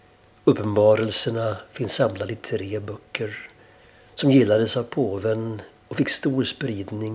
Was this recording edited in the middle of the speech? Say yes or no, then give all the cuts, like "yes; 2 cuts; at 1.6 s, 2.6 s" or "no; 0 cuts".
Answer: no; 0 cuts